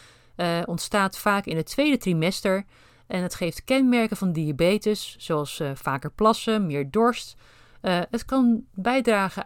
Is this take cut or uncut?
uncut